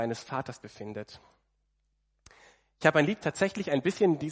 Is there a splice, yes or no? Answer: yes